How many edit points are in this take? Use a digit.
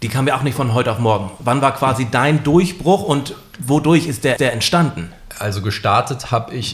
1